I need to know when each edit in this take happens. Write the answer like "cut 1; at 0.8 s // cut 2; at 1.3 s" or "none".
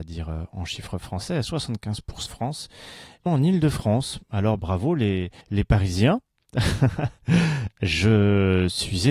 cut 1; at 2.3 s // cut 2; at 3.3 s // cut 3; at 4.6 s // cut 4; at 5.4 s